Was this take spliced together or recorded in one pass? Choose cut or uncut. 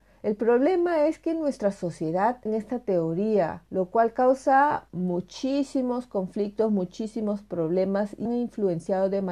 cut